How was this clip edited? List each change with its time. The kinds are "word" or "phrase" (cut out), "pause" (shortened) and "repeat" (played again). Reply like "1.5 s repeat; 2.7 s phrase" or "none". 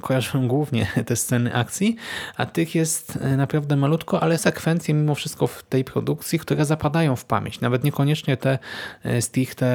4.4 s word